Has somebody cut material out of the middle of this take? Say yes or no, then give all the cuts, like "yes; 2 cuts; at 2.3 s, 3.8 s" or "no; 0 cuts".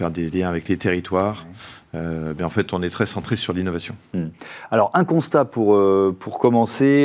no; 0 cuts